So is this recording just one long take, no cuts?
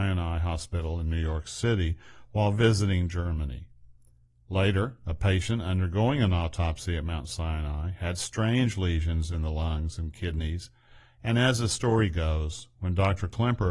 yes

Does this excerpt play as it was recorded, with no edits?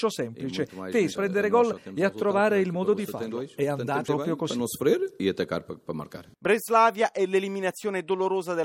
no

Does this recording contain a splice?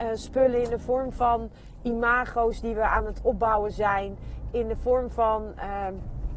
no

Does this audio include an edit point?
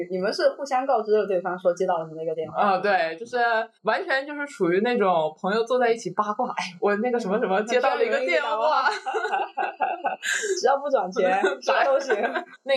yes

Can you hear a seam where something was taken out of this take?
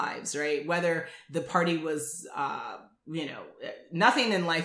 no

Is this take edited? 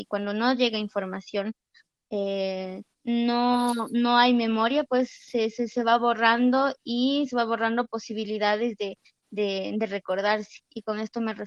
yes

